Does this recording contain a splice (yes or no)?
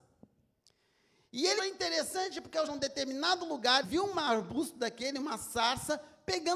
yes